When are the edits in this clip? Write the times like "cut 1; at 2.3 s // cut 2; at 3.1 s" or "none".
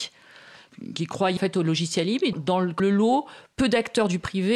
cut 1; at 1.4 s // cut 2; at 2.3 s // cut 3; at 2.8 s